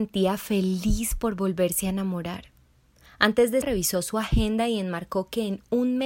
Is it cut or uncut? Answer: cut